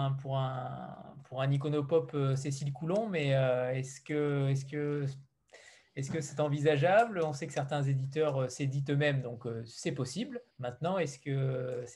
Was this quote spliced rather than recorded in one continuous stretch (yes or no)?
yes